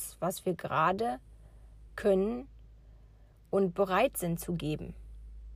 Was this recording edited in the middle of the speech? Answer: no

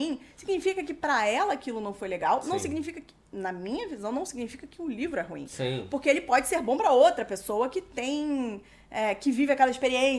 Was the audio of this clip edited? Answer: no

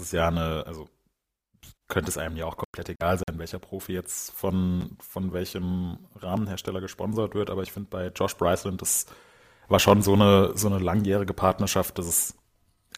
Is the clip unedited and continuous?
no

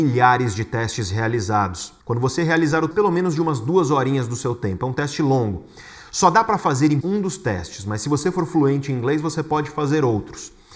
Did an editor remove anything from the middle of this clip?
yes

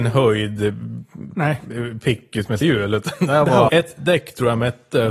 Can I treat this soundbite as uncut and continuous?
no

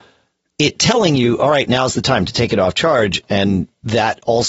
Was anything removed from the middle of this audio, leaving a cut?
no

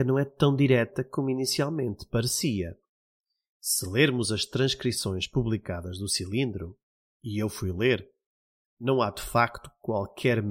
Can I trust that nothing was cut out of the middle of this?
yes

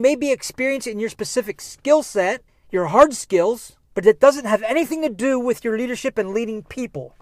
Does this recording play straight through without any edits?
no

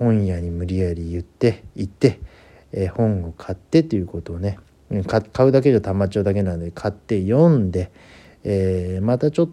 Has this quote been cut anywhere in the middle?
no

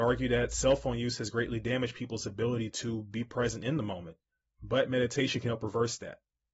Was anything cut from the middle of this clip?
no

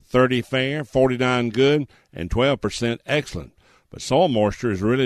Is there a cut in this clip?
no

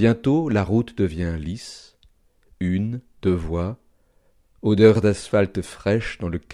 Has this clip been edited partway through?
no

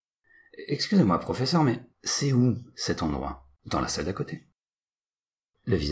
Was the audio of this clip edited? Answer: yes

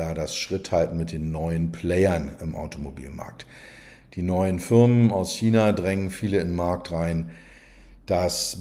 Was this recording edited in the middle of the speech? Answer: no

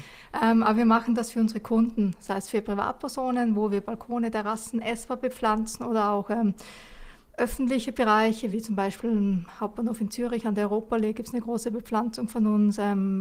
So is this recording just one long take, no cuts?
yes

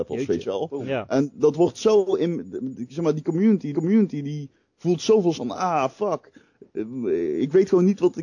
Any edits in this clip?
yes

